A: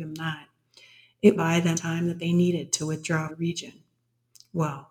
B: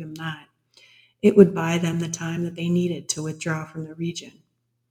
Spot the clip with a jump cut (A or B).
A